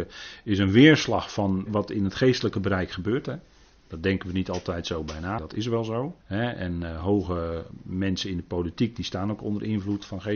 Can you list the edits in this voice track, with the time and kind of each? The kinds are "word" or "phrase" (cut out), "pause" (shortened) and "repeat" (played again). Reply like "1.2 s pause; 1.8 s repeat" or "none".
1.7 s word; 3.7 s pause; 5.4 s word; 6.2 s pause